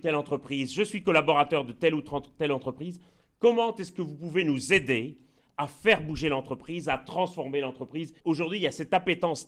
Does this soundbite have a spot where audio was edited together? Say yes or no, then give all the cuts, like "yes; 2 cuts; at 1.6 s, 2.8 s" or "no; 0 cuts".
yes; 1 cut; at 8.2 s